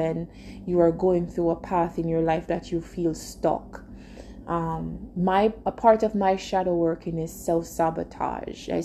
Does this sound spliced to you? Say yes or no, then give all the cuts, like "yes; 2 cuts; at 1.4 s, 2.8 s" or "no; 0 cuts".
no; 0 cuts